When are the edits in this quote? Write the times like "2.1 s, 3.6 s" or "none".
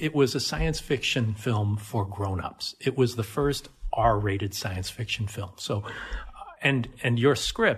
none